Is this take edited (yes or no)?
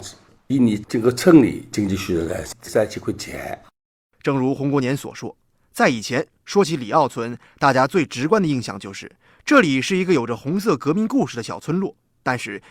yes